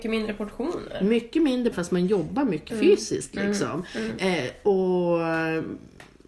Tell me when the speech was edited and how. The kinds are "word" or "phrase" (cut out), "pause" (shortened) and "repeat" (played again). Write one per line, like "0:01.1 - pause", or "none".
0:01.7 - word
0:02.7 - word